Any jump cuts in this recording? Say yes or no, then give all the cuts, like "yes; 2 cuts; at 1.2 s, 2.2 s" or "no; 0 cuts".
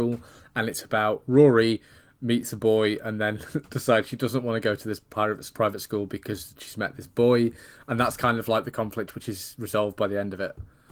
no; 0 cuts